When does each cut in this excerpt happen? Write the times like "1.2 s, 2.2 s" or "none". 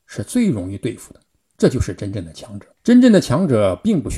1.3 s, 2.7 s